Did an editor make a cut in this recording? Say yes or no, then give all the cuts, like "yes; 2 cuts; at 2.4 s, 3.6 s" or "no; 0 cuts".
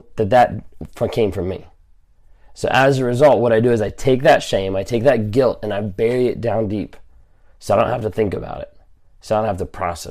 no; 0 cuts